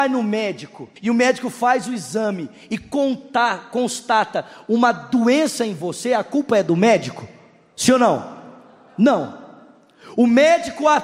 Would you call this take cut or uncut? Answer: cut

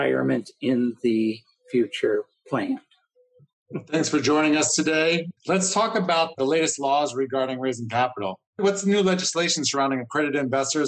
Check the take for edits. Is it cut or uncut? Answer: cut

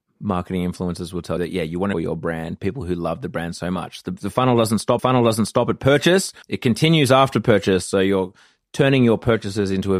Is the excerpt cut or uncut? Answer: cut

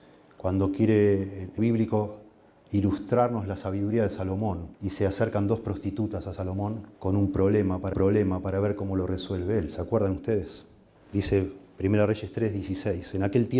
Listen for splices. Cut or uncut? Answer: cut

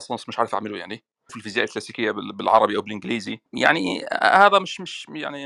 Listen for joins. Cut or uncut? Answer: cut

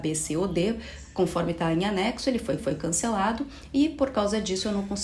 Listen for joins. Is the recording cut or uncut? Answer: cut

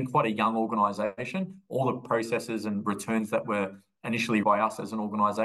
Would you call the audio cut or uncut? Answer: cut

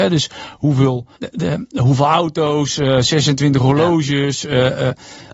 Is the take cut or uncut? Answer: cut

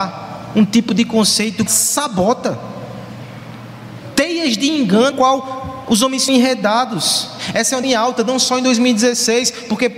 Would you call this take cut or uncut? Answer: cut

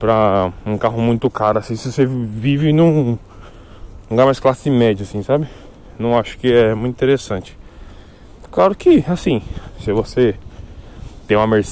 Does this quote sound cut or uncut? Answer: uncut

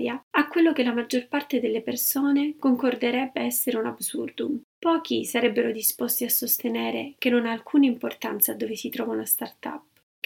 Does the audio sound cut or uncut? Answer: cut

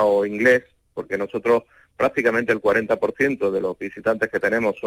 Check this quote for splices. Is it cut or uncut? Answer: uncut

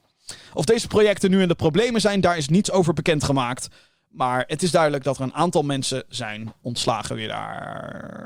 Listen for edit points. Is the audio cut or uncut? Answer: uncut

